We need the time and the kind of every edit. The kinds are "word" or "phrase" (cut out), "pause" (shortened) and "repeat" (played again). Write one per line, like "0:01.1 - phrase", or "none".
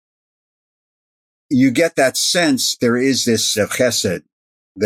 0:02.8 - word
0:03.6 - word